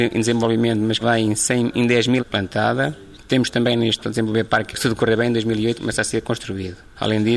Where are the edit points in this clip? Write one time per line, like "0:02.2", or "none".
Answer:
0:01.0
0:02.2
0:04.0
0:04.7